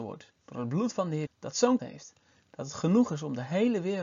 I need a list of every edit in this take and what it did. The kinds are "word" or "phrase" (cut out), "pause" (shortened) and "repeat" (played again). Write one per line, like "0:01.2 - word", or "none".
0:01.3 - word
0:01.8 - word